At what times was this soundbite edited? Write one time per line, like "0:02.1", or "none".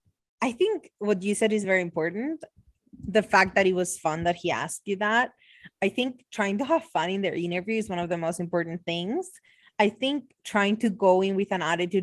none